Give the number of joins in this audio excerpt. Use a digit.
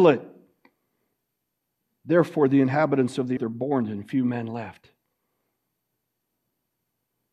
1